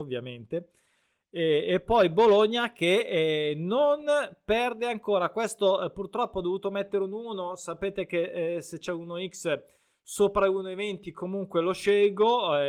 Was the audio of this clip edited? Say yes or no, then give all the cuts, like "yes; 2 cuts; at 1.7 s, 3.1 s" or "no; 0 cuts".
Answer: no; 0 cuts